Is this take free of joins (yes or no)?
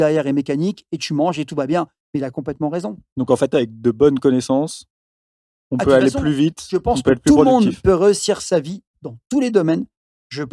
yes